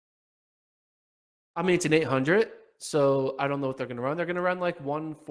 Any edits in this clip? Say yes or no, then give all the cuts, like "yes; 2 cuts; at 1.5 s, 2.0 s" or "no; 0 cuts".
no; 0 cuts